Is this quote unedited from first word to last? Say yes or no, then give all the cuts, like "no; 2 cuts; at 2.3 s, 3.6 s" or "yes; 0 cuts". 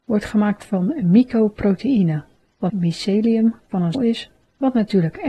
no; 2 cuts; at 2.7 s, 3.9 s